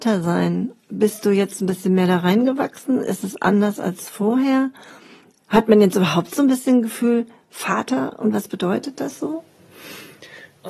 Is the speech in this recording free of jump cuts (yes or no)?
yes